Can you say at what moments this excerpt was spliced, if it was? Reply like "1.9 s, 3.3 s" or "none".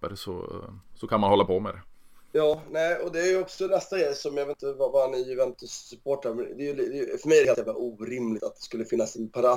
none